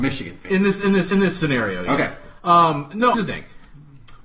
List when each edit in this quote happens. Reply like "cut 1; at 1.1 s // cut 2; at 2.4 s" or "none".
cut 1; at 1.1 s // cut 2; at 3.1 s